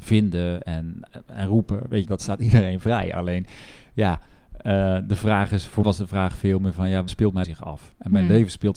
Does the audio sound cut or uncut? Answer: cut